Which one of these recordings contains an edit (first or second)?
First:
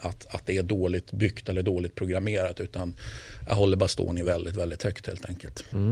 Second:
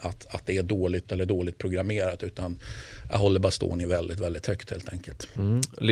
second